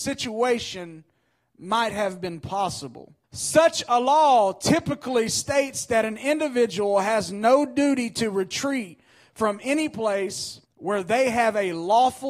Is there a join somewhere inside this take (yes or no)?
yes